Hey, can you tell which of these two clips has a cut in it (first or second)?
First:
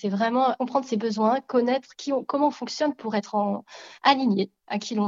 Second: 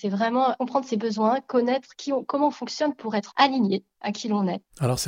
second